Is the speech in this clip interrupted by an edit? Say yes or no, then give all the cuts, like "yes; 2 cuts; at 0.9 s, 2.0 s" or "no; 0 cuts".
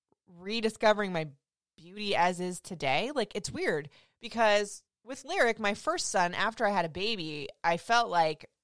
no; 0 cuts